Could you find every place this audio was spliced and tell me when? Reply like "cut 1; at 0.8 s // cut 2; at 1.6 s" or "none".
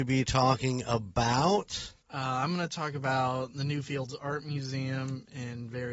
cut 1; at 2.0 s